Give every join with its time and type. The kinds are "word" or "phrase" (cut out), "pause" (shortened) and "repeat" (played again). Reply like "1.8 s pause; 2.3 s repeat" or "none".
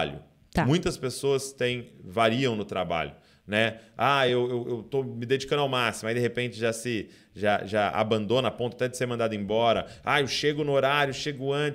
none

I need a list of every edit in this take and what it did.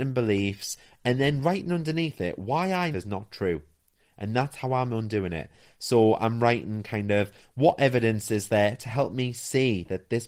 2.9 s phrase

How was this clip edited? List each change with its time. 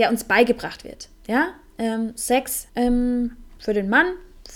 2.7 s phrase

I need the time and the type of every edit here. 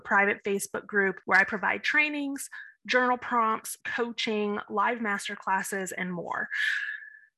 3.8 s phrase

